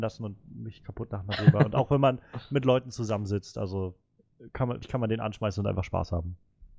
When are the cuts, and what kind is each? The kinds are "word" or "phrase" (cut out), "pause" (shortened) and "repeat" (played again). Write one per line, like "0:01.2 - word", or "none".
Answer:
0:04.8 - word